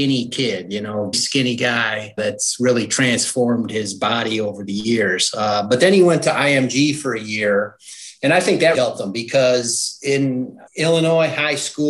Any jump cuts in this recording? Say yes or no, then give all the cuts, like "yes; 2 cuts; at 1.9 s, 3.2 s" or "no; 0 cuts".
yes; 4 cuts; at 1.1 s, 2.2 s, 8.7 s, 10.7 s